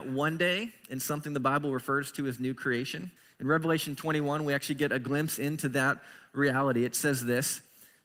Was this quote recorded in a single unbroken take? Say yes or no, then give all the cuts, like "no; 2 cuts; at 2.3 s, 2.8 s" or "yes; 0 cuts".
no; 1 cut; at 3.2 s